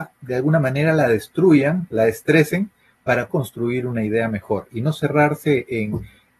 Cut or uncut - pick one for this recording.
cut